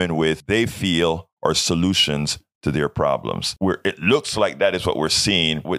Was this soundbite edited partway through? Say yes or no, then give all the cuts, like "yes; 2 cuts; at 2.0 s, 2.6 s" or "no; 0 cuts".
no; 0 cuts